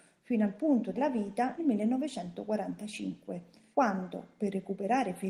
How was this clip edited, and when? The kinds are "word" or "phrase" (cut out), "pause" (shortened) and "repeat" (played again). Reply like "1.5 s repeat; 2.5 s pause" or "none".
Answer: 1.0 s word; 1.6 s word; 3.7 s pause